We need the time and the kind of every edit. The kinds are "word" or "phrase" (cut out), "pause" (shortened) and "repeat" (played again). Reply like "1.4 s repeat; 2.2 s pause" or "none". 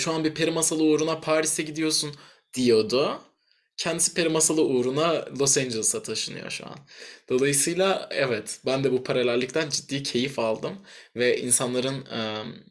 none

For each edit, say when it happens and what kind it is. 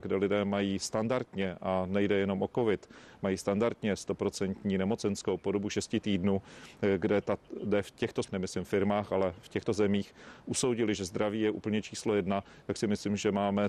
8.2 s word; 9.4 s word

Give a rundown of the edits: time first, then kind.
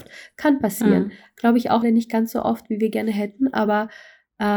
1.8 s word

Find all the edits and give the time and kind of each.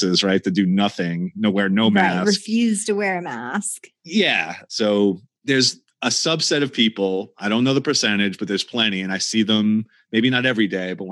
none

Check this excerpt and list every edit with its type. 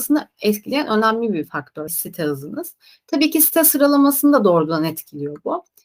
1.9 s word

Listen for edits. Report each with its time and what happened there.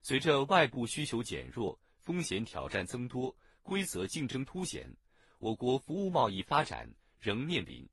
none

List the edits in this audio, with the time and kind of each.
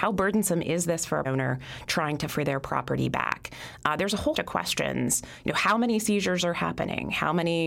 1.2 s word; 2.3 s word; 4.3 s word

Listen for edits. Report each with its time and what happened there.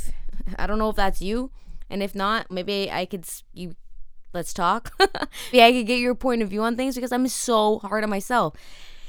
2.5 s word; 3.5 s word; 5.5 s word

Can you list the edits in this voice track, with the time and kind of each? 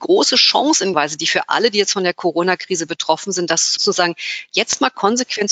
0.9 s word; 3.8 s word

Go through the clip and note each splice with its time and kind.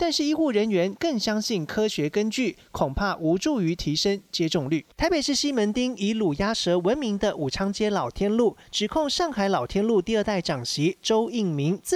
4.9 s pause

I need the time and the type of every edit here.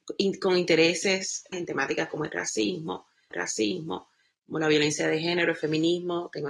1.5 s word; 3.3 s repeat

